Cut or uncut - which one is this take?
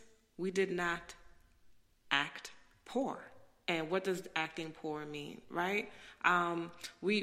uncut